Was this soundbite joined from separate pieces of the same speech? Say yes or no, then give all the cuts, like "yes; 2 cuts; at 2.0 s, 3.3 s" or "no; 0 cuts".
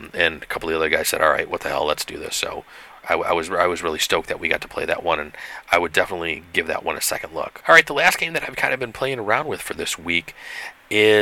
no; 0 cuts